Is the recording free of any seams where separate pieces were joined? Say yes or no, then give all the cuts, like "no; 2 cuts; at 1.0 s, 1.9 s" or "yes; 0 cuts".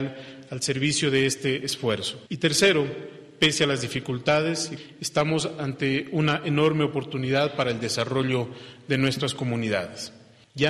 no; 1 cut; at 2.3 s